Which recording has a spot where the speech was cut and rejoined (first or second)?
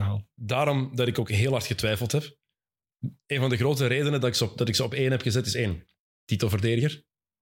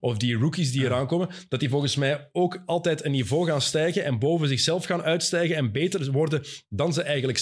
first